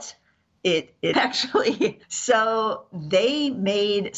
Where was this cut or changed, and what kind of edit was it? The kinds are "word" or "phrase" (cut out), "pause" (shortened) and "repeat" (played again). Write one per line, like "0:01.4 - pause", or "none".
0:01.1 - word
0:02.0 - pause